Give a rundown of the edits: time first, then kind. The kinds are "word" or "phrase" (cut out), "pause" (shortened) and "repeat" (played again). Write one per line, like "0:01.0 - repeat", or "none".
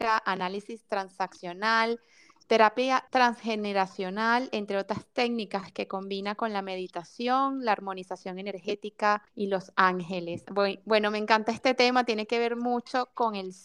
0:03.1 - pause
0:09.3 - pause